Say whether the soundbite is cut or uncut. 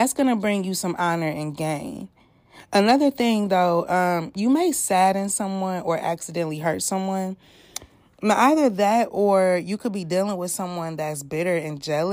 uncut